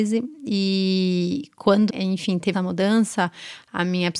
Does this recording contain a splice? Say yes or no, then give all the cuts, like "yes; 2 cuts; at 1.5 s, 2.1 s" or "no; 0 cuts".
yes; 2 cuts; at 1.9 s, 2.5 s